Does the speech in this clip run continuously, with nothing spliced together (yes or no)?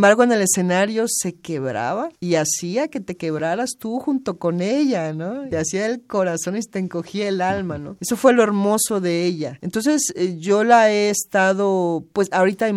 yes